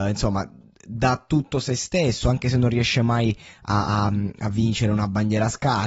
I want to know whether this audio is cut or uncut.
uncut